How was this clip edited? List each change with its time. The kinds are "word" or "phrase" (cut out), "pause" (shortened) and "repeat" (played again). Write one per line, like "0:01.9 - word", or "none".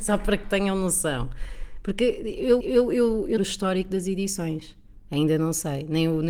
0:02.6 - repeat
0:03.4 - phrase
0:05.0 - pause

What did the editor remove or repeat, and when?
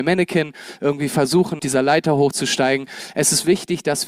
0:01.6 - word

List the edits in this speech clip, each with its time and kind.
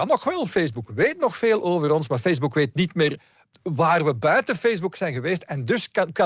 none

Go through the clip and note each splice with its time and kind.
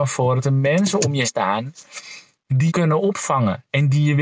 0:01.2 - word
0:02.7 - word

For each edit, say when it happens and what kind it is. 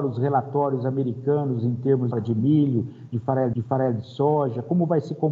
0:02.1 - phrase
0:03.5 - repeat

